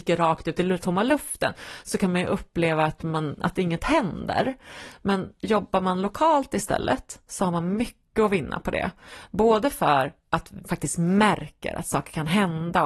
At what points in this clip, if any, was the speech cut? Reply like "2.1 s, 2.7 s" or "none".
10.6 s